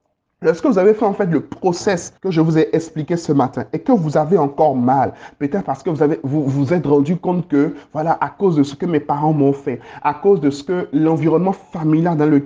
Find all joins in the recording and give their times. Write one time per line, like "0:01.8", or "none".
0:02.2